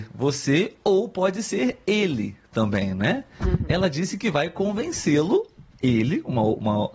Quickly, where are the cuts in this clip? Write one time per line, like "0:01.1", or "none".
none